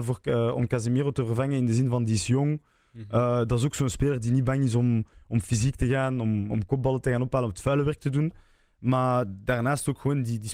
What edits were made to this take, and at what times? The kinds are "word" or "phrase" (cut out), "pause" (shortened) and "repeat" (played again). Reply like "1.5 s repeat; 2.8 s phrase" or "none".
6.5 s word